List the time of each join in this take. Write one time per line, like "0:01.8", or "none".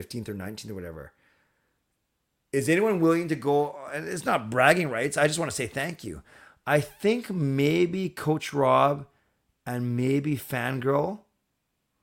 none

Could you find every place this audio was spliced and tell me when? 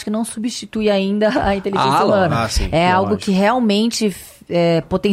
none

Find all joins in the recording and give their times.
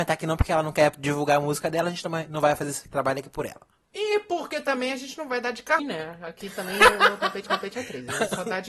0:05.8
0:07.5

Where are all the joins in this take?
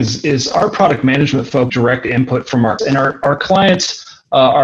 0:01.7
0:02.8

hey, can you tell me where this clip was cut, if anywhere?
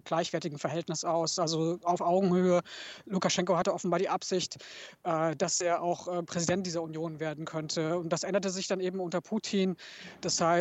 none

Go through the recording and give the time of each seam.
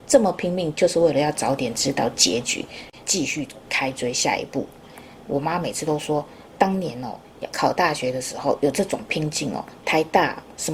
0:03.0

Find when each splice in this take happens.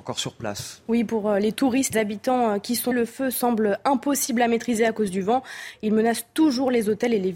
0:01.9
0:02.9

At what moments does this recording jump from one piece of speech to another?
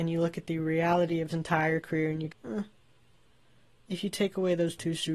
0:01.3
0:02.3

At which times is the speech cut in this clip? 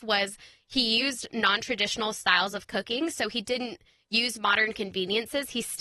none

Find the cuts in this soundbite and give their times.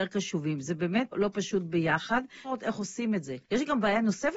0:01.1
0:02.4
0:03.4

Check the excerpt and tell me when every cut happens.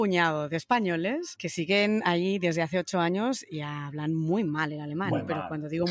none

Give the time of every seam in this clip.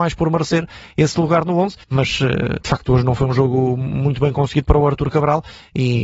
0:01.8

